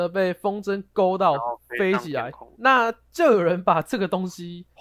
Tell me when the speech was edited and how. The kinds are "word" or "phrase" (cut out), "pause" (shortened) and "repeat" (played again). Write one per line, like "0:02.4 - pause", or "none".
0:02.5 - word